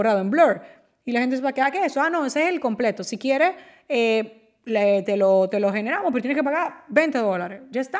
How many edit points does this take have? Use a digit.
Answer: 0